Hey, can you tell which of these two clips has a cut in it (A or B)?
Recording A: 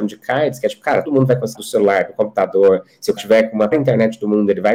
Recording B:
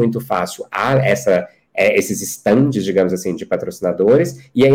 A